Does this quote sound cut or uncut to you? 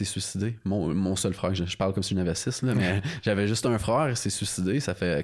uncut